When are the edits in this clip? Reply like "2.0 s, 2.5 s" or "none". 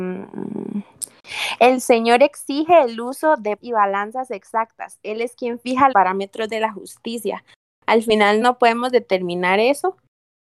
3.6 s, 5.9 s, 8.4 s

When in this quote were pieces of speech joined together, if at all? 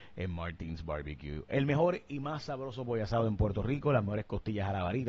none

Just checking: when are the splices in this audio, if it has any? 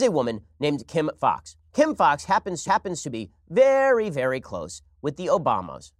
1.7 s, 2.6 s

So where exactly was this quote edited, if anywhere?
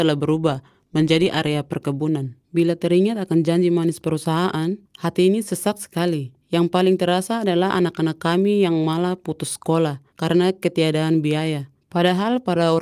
2.4 s, 4.8 s, 6.4 s, 10.1 s, 11.8 s

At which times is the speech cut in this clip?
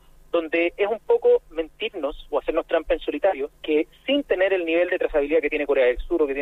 3.6 s

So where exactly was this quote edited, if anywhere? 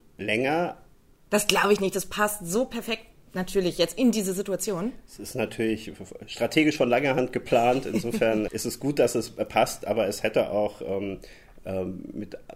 8.5 s

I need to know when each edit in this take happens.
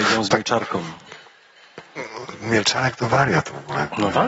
none

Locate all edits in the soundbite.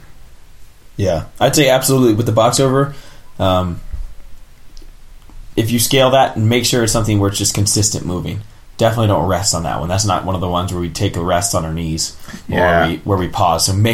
none

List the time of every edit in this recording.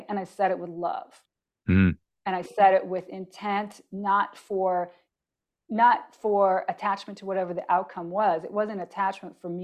none

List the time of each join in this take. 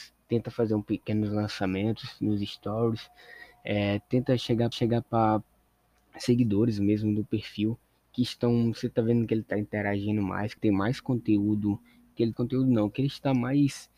4.7 s, 10.6 s, 12.3 s

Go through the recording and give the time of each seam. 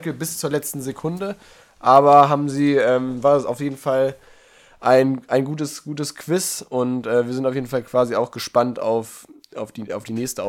none

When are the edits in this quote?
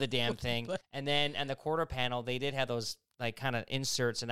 none

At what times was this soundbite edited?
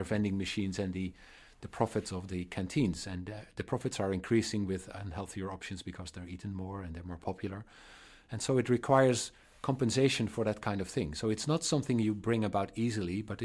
none

